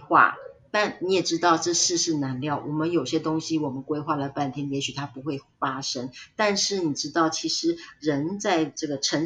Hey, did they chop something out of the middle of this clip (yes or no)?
no